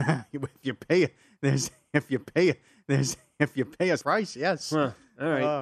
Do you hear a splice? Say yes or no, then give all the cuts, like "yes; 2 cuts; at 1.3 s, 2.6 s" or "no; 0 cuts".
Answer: yes; 2 cuts; at 2.2 s, 4.0 s